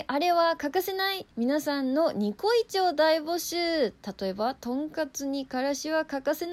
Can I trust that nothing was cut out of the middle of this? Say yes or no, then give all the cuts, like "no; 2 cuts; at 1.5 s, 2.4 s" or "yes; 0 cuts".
no; 1 cut; at 1.3 s